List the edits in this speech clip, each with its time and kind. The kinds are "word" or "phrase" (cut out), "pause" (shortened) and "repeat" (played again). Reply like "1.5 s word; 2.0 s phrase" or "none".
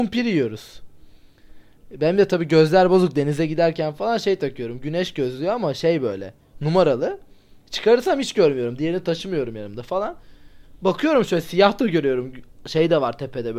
none